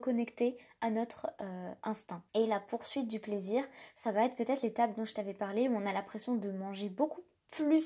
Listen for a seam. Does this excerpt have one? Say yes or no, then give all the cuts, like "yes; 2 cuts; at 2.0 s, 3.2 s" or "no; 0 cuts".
yes; 1 cut; at 2.3 s